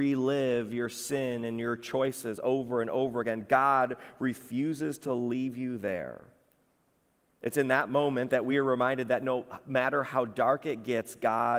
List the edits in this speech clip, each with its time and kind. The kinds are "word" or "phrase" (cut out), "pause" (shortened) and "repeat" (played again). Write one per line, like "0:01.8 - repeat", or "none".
none